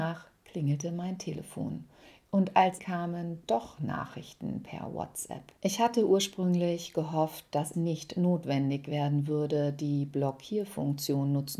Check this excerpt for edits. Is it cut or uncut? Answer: cut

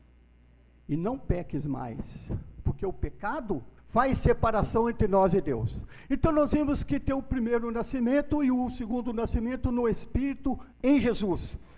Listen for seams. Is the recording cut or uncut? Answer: cut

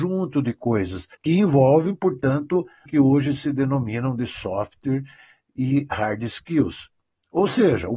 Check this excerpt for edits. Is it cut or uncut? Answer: cut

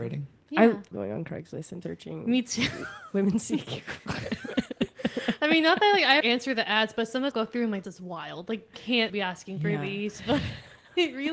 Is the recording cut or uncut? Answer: cut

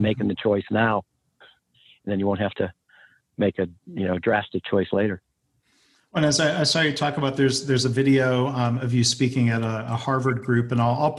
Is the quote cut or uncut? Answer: uncut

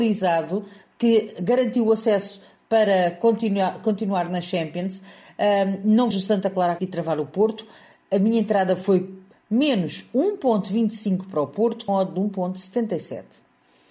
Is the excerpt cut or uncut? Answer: cut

